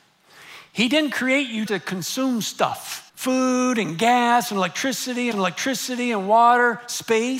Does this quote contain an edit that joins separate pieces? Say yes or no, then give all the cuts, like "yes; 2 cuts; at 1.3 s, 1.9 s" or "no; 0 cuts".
yes; 3 cuts; at 1.7 s, 3.1 s, 5.3 s